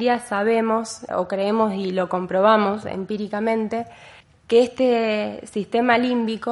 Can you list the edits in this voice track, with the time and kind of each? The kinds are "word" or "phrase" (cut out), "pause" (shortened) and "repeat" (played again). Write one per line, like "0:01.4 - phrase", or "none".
0:01.1 - word
0:04.2 - pause